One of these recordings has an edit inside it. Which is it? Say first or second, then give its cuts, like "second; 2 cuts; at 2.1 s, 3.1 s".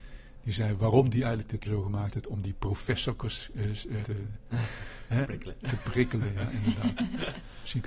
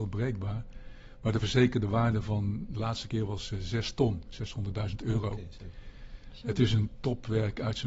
first; 3 cuts; at 1.7 s, 4.0 s, 5.2 s